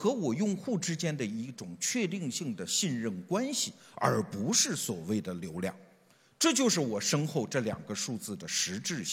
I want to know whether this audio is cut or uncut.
uncut